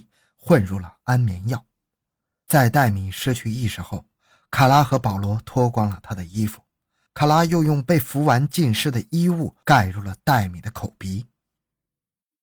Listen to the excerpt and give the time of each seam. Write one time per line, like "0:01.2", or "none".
none